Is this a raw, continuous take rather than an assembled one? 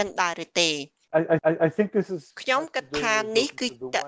no; 2 cuts; at 1.4 s, 2.3 s

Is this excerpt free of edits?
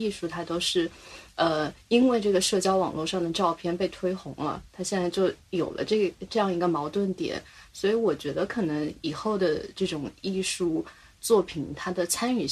yes; 0 cuts

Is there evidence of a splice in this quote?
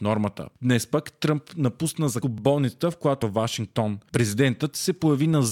yes; 2 cuts; at 2.2 s, 3.2 s

